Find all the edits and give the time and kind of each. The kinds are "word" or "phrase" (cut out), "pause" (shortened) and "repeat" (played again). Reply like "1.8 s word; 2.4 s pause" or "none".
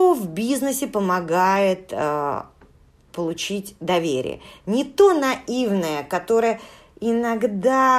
none